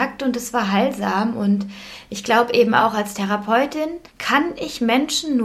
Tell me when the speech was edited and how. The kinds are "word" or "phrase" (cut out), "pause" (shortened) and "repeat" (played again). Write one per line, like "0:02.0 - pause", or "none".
0:04.1 - pause